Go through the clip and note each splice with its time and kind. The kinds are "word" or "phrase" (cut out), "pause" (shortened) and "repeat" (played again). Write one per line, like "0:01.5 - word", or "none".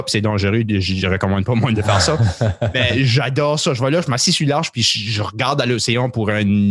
none